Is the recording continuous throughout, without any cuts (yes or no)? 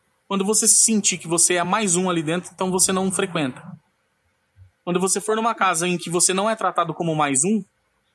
yes